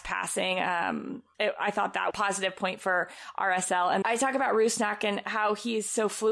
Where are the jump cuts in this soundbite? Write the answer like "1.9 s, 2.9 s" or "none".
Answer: 2.1 s, 4.0 s

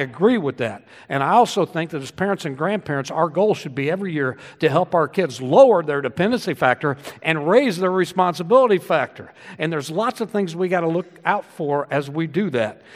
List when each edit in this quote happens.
none

